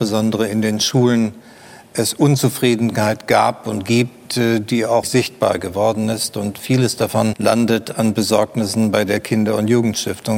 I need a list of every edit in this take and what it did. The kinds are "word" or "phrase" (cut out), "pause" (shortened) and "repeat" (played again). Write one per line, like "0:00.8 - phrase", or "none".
0:05.0 - word
0:07.3 - word